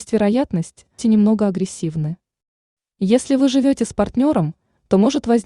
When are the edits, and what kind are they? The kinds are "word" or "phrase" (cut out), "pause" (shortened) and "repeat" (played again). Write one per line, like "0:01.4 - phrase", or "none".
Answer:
0:01.0 - phrase